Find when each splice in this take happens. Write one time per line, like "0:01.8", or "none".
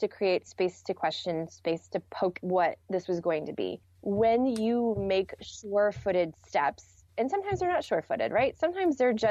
0:02.4
0:02.8
0:05.4

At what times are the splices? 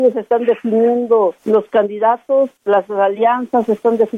0:01.4
0:02.6

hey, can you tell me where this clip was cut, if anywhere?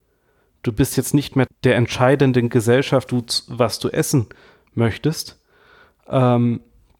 0:01.5
0:03.1

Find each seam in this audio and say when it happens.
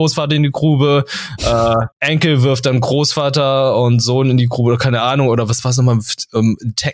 0:01.9

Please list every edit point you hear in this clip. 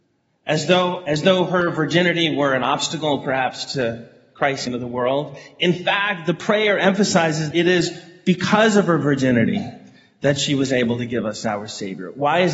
0:04.7
0:07.5

